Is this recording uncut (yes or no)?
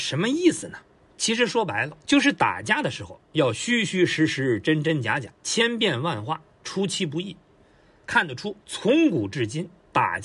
no